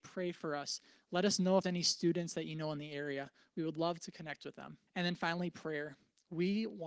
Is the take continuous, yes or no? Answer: no